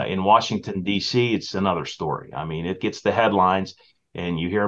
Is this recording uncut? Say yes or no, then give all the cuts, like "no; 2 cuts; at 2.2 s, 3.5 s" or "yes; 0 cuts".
yes; 0 cuts